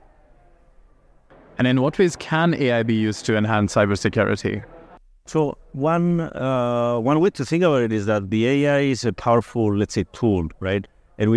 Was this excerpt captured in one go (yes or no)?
yes